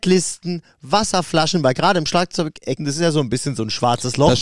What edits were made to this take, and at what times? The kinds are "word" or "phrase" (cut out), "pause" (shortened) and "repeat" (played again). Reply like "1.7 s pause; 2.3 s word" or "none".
2.8 s word